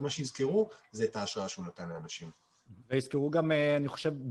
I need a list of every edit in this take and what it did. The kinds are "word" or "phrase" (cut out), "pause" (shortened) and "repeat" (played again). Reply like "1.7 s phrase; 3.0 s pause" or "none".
2.8 s pause